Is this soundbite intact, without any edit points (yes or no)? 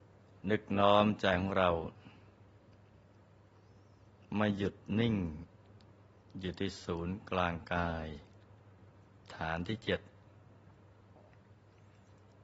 yes